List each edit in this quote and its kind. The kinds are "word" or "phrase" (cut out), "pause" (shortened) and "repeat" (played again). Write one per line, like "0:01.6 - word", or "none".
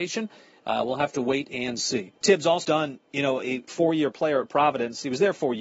0:02.2 - pause
0:02.6 - phrase
0:03.7 - word

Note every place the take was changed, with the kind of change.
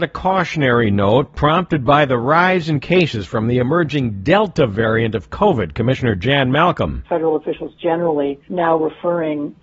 0:08.4 - pause

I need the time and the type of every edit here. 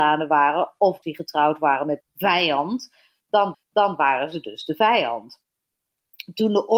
0:01.0 - word
0:02.0 - word
0:03.5 - repeat

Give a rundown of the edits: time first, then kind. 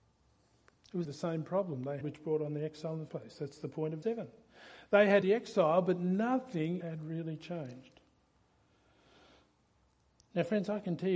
0:01.0 - word
0:02.0 - word
0:03.1 - word
0:04.0 - word
0:05.2 - word
0:06.8 - word

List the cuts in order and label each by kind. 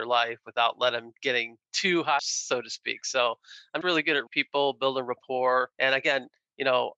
0:01.6 - pause
0:02.2 - phrase
0:03.8 - word
0:04.3 - word
0:05.7 - pause

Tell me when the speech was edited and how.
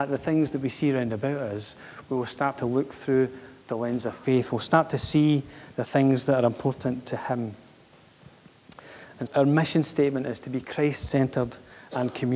0:09.3 - word

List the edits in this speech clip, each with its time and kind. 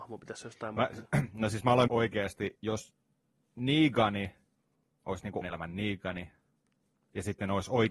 0:01.9 - phrase
0:02.6 - word
0:04.6 - pause
0:05.4 - word

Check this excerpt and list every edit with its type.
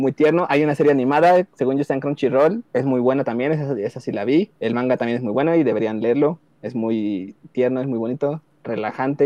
0:02.7 - pause
0:04.6 - pause

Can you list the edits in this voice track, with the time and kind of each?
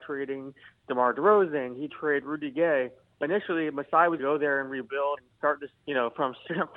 0:01.9 - word
0:03.2 - word
0:04.2 - word
0:05.2 - word
0:05.8 - word

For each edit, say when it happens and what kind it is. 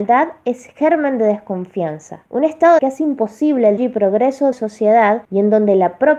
0:02.3 - pause
0:02.8 - phrase
0:03.8 - word
0:04.5 - phrase
0:05.2 - pause

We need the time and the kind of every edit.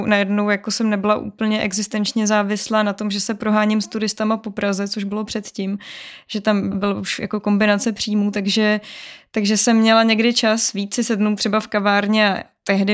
0:06.7 - word

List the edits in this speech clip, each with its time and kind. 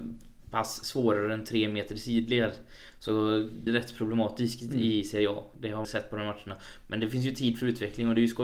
0:03.7 - word
0:05.8 - word

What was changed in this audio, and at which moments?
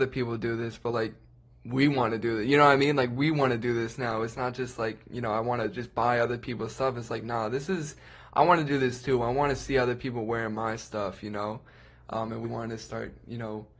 0:12.4 - word

